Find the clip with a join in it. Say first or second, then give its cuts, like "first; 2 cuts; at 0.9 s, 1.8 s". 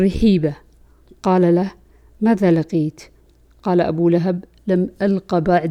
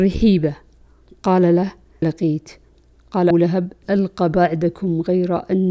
second; 3 cuts; at 2.0 s, 3.3 s, 3.8 s